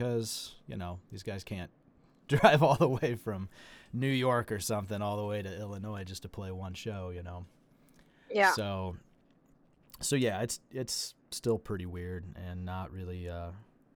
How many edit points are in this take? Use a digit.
0